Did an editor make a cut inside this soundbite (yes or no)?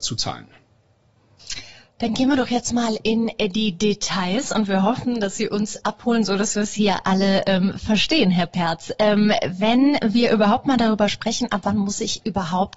no